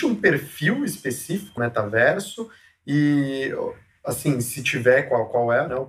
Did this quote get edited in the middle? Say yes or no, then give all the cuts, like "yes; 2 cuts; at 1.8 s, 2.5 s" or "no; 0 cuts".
yes; 1 cut; at 1.6 s